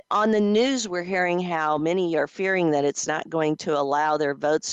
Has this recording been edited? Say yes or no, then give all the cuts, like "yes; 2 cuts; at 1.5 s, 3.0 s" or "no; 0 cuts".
no; 0 cuts